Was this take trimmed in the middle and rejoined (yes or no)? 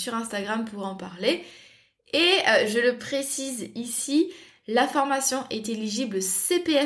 no